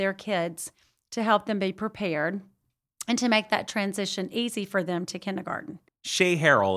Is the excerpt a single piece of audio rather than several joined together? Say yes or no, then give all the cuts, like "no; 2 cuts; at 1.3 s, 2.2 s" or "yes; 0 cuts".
yes; 0 cuts